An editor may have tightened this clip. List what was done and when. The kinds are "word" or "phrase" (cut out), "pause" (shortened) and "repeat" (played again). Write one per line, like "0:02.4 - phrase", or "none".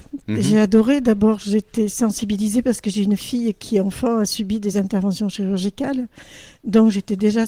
none